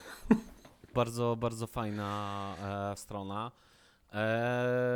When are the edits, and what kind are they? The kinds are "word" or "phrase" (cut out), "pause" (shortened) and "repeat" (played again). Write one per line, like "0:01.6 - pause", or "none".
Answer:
0:00.9 - word
0:03.0 - word